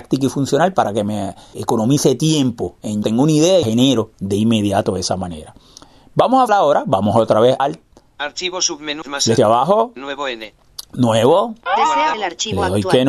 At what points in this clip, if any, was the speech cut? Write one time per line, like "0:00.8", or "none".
0:01.5
0:03.0
0:03.6
0:06.5
0:07.6
0:09.0
0:09.4
0:12.1

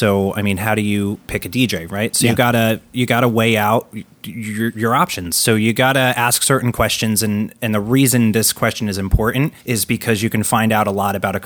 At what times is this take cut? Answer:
0:09.6

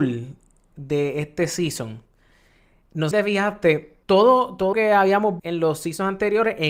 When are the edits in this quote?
0:03.1
0:04.0
0:04.7
0:05.4

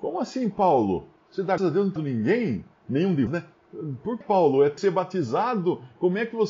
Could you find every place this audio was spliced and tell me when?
0:01.6
0:02.0
0:03.3
0:04.2
0:04.8

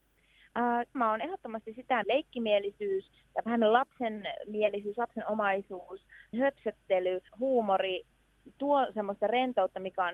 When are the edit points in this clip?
0:00.9
0:02.0
0:06.3
0:07.3

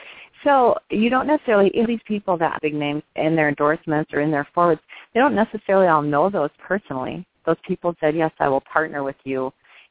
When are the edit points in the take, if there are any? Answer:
0:01.9
0:02.6
0:03.1
0:06.6
0:07.9

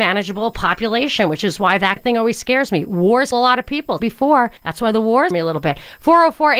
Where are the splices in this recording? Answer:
0:02.0
0:03.3
0:04.0
0:04.6
0:05.3

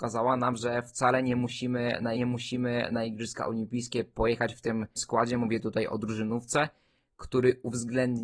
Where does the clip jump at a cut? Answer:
0:02.1
0:05.0

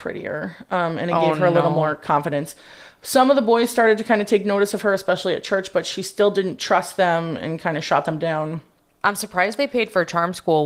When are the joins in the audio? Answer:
none

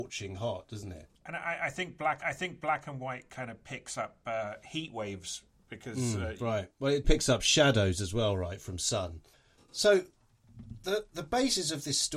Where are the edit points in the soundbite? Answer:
0:01.1
0:02.2
0:05.5
0:07.0

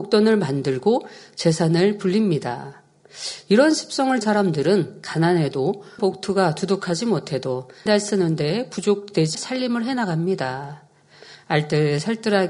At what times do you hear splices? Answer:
0:04.2
0:06.0
0:07.9
0:09.3

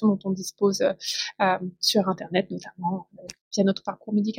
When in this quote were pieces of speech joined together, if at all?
none

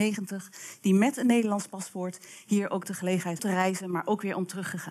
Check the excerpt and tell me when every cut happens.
0:03.4

